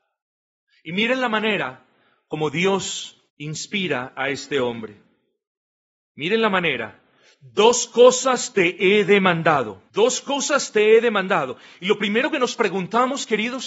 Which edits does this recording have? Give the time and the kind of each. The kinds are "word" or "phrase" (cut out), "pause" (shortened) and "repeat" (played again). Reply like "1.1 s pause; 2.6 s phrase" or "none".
3.3 s pause; 9.9 s pause